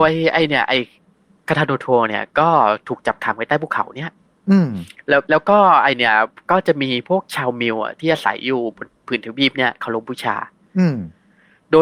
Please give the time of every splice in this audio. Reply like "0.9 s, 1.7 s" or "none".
5.2 s

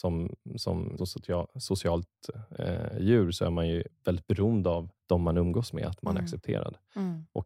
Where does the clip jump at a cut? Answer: 1.0 s, 3.9 s, 4.9 s

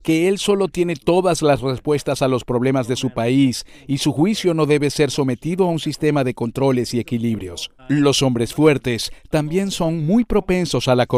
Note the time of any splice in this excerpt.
7.8 s

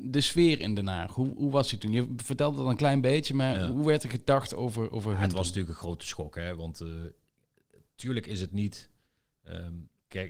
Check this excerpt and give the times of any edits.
none

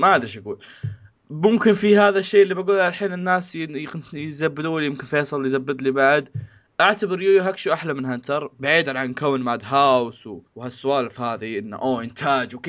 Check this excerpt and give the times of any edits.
10.5 s

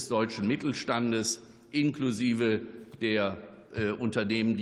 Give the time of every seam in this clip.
none

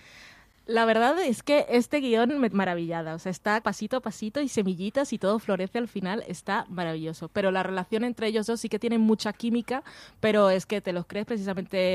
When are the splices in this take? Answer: 2.5 s, 3.6 s

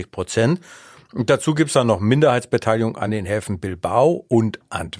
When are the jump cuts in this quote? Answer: none

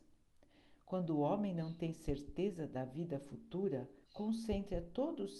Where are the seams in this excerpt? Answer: 4.0 s

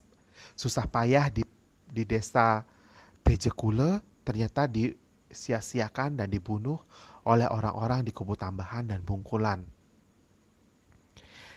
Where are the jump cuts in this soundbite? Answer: none

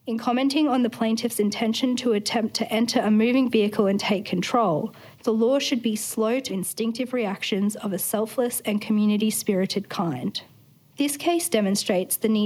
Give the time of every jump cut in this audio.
5.1 s, 6.5 s

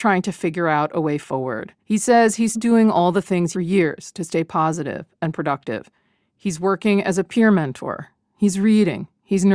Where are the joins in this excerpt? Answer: 1.8 s, 2.5 s, 3.5 s

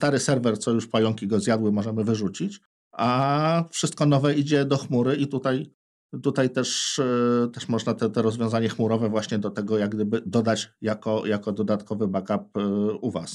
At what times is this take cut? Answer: 2.7 s

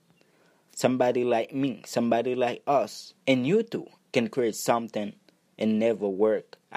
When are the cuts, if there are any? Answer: 3.2 s, 4.0 s

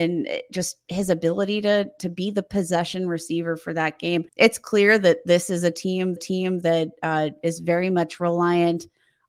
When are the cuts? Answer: 4.3 s, 6.2 s

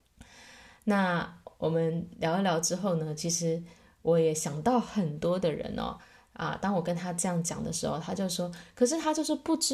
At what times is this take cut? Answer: none

